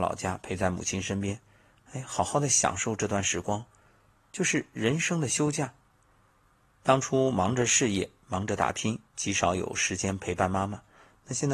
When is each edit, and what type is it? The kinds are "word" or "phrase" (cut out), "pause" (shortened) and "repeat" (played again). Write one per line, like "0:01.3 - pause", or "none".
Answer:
0:09.1 - pause

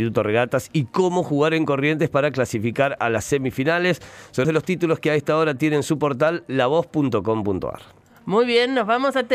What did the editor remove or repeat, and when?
0:04.4 - word

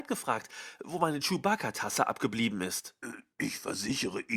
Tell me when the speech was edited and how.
none

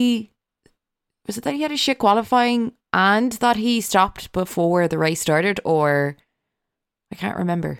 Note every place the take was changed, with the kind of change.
0:02.8 - pause

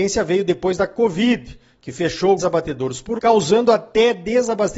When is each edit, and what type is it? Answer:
0:02.4 - word
0:03.2 - word

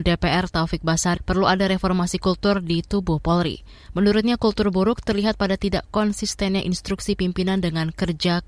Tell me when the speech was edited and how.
0:01.2 - word

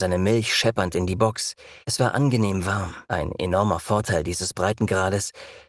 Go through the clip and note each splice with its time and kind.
0:01.8 - pause
0:03.1 - pause

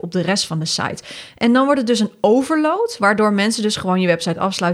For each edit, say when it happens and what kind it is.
none

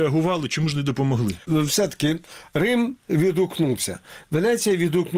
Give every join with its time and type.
0:01.4 - pause

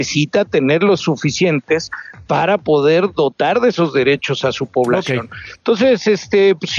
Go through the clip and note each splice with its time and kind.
0:01.0 - word

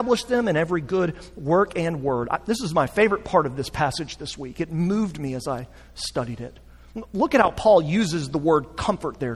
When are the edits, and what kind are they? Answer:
none

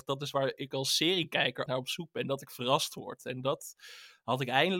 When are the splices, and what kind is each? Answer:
0:01.7 - word

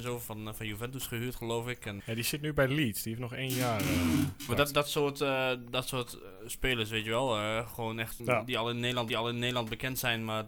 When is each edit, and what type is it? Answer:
0:02.0 - word
0:04.5 - word
0:08.2 - word
0:09.1 - repeat

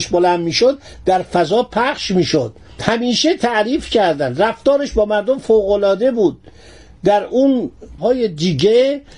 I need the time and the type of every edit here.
0:08.0 - word

